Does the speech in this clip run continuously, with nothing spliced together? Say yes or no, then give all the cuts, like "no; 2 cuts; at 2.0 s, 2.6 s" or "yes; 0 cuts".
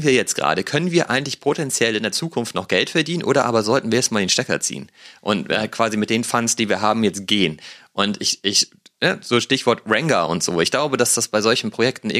yes; 0 cuts